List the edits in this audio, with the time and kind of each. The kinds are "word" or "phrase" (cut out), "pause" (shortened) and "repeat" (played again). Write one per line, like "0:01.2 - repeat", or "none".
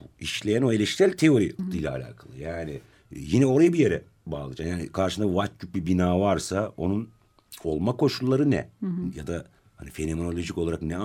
0:01.6 - word
0:02.9 - pause
0:09.6 - pause